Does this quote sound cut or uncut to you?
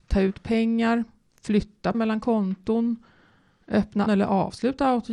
cut